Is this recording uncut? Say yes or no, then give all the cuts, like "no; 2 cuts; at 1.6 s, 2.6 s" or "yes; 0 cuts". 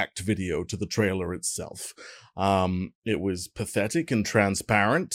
yes; 0 cuts